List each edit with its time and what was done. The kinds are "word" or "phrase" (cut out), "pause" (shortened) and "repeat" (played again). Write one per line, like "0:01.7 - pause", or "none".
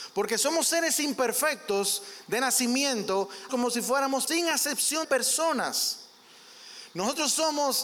0:03.5 - word
0:04.3 - word
0:05.0 - word